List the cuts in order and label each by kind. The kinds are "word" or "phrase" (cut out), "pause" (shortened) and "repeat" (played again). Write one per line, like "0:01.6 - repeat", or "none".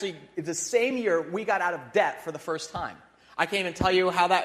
none